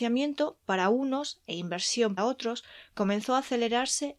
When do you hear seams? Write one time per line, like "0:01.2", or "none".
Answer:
0:02.2